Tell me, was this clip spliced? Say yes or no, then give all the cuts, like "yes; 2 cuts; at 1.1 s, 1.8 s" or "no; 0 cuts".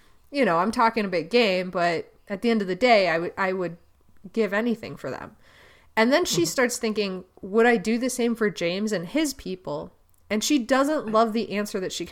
no; 0 cuts